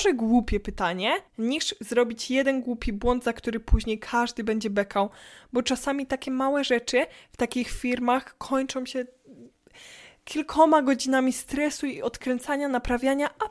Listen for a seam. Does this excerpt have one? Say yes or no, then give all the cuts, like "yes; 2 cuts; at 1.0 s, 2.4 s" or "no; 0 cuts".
yes; 1 cut; at 1.3 s